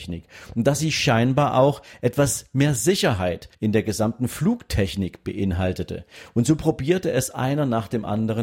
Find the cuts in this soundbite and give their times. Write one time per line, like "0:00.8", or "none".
0:03.5